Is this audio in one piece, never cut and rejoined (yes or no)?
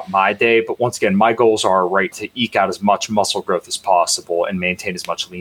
no